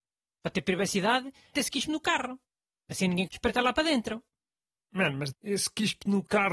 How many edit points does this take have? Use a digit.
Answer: 3